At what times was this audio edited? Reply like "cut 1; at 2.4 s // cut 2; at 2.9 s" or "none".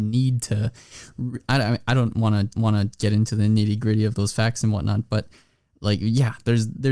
cut 1; at 2.5 s // cut 2; at 4.1 s